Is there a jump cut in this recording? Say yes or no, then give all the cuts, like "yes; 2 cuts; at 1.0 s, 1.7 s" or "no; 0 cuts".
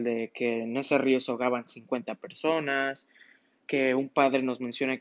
no; 0 cuts